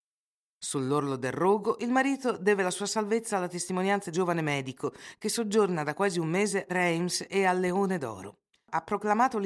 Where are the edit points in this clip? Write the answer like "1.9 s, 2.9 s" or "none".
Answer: 4.1 s, 6.7 s, 8.5 s